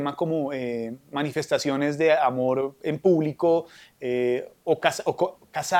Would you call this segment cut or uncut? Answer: uncut